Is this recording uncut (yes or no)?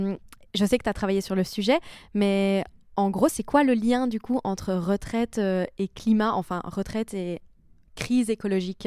yes